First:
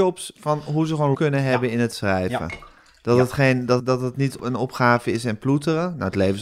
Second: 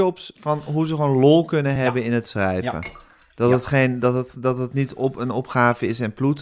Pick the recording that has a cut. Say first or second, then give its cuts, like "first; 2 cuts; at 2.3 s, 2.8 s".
first; 3 cuts; at 1.1 s, 3.8 s, 4.4 s